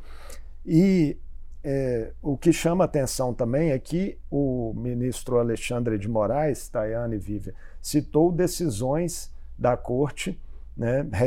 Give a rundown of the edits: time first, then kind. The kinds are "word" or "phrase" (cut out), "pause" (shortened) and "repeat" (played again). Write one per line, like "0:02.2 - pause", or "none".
none

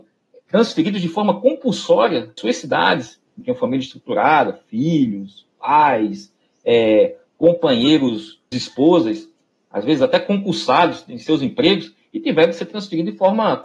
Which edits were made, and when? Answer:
0:02.4 - word
0:03.4 - word
0:08.5 - word

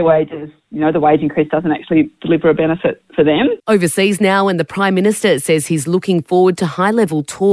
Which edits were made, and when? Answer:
0:03.6 - pause

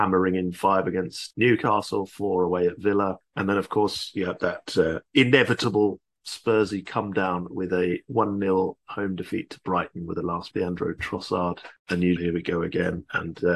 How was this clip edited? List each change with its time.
0:01.3 - word
0:10.5 - phrase
0:12.2 - phrase

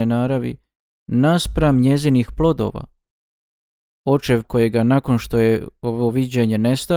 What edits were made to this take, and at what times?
0:04.4 - phrase

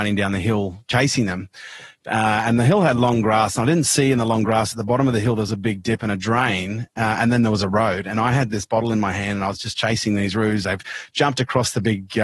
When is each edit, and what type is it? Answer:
none

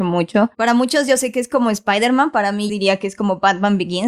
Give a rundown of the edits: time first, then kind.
0:02.7 - phrase

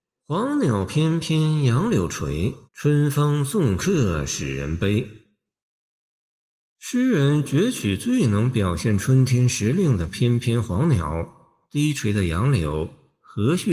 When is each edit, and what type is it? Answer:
0:02.6 - pause

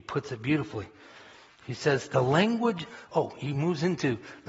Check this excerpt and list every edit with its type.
none

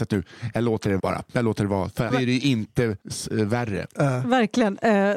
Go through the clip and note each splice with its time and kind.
0:01.0 - word
0:02.1 - phrase
0:03.0 - pause

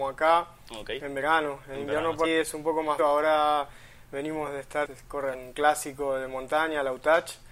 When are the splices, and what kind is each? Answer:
0:02.2 - word
0:03.0 - word
0:04.8 - phrase
0:05.3 - word

